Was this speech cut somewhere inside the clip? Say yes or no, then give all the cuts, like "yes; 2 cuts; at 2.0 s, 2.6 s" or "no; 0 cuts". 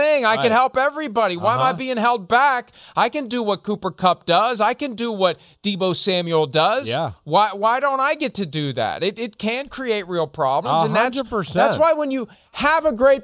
no; 0 cuts